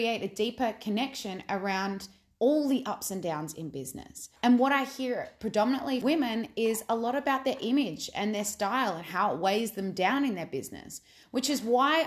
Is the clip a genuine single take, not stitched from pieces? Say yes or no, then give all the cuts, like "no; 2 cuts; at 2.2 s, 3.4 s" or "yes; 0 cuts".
no; 2 cuts; at 4.4 s, 6.0 s